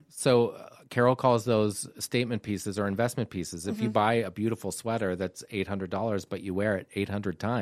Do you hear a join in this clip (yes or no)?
no